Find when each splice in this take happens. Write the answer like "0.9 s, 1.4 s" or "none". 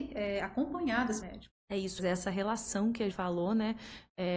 1.2 s, 2.0 s, 3.1 s